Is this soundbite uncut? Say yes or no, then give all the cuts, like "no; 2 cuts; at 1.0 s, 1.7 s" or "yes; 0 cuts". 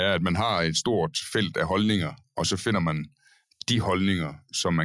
yes; 0 cuts